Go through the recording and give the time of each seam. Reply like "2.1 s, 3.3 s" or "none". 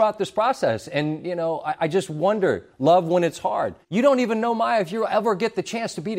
3.8 s